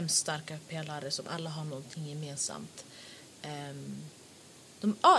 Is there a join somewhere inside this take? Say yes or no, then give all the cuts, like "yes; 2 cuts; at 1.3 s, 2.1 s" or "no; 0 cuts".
no; 0 cuts